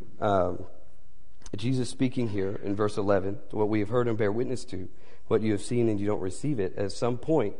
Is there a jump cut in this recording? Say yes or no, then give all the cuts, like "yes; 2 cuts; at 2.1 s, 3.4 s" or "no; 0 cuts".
no; 0 cuts